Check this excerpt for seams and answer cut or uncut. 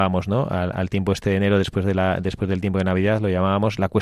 uncut